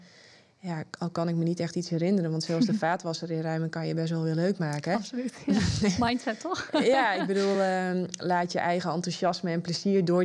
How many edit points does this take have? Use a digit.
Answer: 0